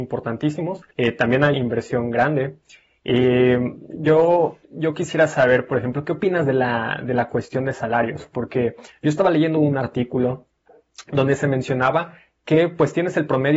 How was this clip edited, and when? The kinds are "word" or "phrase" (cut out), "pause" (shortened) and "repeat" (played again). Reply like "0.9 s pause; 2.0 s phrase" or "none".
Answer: 0.9 s pause; 1.5 s word; 4.6 s pause